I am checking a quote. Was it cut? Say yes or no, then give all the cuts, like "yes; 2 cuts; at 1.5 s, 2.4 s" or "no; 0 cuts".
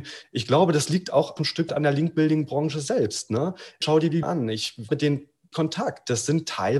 yes; 6 cuts; at 1.4 s, 1.7 s, 3.8 s, 4.2 s, 4.9 s, 5.5 s